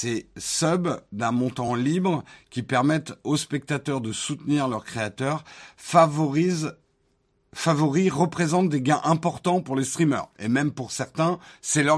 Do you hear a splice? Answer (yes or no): no